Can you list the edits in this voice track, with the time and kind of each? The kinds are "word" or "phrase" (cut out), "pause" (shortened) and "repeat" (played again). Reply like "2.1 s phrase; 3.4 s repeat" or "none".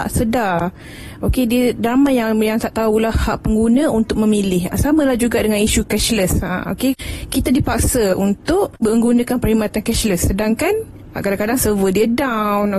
none